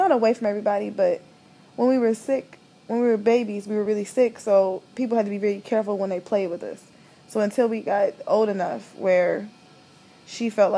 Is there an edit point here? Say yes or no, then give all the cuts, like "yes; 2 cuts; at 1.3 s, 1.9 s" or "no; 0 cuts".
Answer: no; 0 cuts